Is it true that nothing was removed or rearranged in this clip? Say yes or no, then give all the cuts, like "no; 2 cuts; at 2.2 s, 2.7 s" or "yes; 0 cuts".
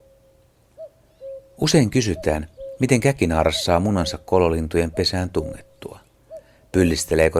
yes; 0 cuts